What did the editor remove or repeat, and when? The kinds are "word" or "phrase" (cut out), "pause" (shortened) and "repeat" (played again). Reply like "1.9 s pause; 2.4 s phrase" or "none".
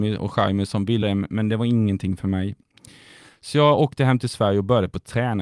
1.0 s word

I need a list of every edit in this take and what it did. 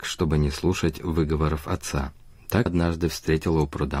2.7 s word

